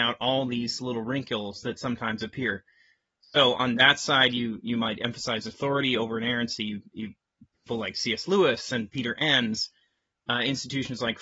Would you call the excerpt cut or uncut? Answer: uncut